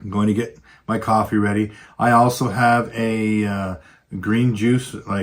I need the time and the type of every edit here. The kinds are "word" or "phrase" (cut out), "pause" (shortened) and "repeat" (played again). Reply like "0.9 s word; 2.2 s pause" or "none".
none